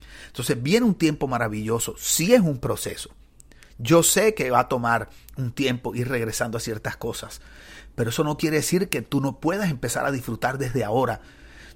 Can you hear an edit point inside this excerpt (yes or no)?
no